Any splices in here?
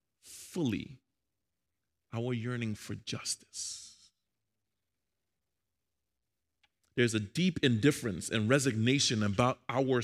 no; 0 cuts

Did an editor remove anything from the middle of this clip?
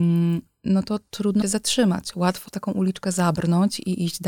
yes; 2 cuts; at 1.4 s, 2.5 s

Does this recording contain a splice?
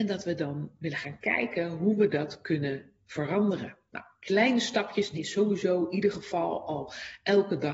yes; 1 cut; at 5.2 s

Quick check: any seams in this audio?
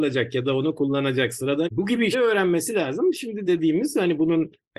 yes; 3 cuts; at 1.6 s, 2.1 s, 3.5 s

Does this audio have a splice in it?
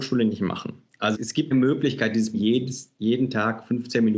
yes; 3 cuts; at 1.1 s, 1.5 s, 2.3 s

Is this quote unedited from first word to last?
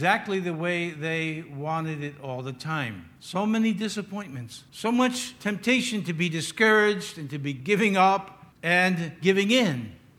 no; 2 cuts; at 3.2 s, 4.7 s

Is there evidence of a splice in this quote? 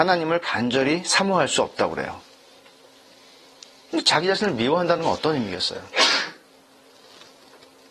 no; 0 cuts

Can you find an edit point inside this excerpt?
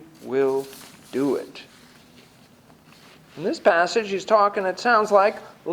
no; 0 cuts

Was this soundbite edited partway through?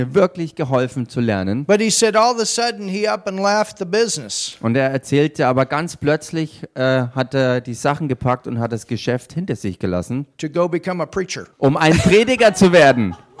yes; 1 cut; at 11.5 s

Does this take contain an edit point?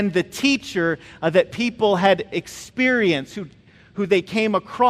no; 0 cuts

